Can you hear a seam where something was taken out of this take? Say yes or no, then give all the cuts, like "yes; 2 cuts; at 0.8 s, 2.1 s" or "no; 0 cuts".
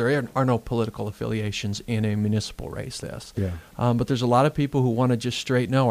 yes; 1 cut; at 3.0 s